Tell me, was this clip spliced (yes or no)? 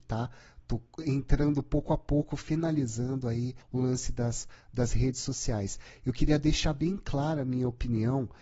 yes